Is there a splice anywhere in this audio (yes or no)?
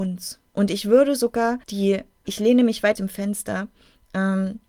yes